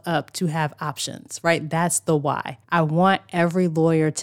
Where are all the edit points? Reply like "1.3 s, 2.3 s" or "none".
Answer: 2.6 s